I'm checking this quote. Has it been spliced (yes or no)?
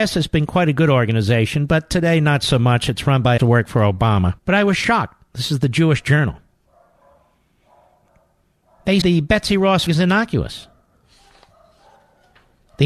yes